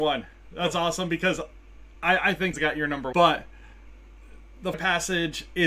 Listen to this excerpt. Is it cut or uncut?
cut